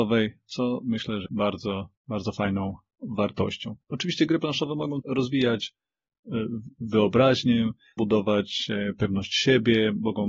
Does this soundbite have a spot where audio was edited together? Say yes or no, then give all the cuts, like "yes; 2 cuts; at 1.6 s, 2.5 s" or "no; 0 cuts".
yes; 5 cuts; at 1.3 s, 2.0 s, 3.8 s, 5.0 s, 8.0 s